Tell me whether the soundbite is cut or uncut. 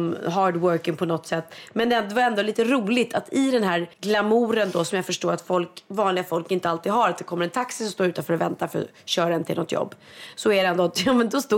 cut